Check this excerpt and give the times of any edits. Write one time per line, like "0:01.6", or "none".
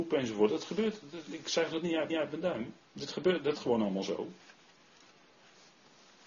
0:02.1
0:02.9
0:03.5